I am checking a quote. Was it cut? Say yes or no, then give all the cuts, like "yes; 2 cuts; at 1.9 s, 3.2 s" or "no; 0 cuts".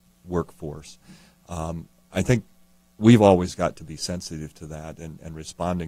no; 0 cuts